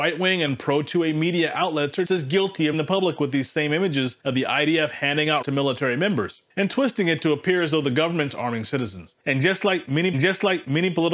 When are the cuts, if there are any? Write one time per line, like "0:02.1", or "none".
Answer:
0:02.0
0:02.7
0:04.2
0:05.4
0:06.5
0:09.2
0:10.1